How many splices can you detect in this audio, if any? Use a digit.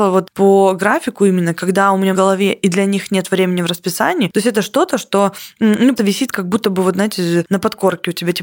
2